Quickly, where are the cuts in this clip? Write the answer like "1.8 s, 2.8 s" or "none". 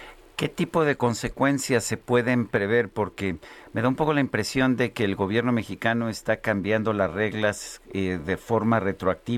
none